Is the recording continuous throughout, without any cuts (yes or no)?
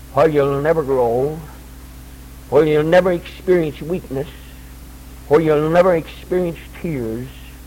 no